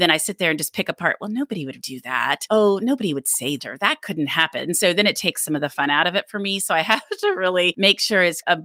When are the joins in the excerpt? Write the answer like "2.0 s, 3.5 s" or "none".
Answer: 1.8 s, 3.6 s